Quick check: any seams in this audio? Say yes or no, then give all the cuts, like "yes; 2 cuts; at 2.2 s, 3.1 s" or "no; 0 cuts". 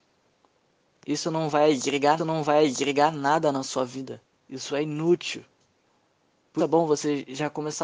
yes; 3 cuts; at 2.2 s, 4.3 s, 6.6 s